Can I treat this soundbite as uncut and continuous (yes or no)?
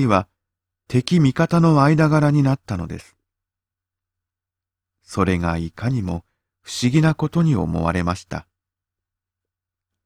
yes